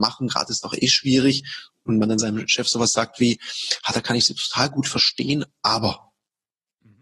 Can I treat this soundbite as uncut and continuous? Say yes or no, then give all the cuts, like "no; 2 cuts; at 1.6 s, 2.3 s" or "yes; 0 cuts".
yes; 0 cuts